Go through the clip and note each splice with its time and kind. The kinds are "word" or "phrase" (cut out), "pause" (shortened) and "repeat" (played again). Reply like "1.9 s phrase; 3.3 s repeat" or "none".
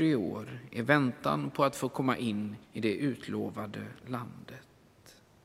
2.6 s pause